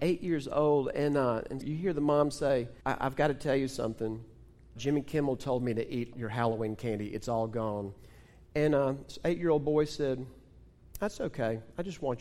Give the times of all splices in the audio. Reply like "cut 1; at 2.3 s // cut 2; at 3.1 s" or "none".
cut 1; at 1.6 s // cut 2; at 2.8 s // cut 3; at 4.8 s // cut 4; at 6.1 s